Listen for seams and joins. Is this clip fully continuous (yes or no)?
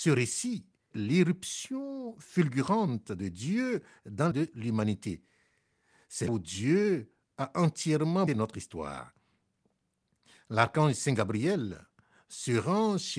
no